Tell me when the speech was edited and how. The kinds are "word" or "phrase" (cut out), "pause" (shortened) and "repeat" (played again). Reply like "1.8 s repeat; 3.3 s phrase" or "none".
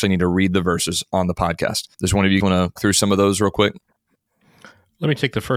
1.9 s pause; 2.4 s word; 2.8 s word